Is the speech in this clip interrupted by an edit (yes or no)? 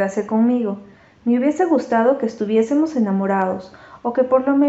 no